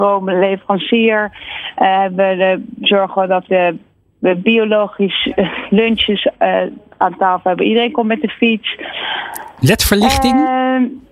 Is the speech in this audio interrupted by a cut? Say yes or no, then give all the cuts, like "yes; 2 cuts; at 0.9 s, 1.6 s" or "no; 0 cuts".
yes; 1 cut; at 3.5 s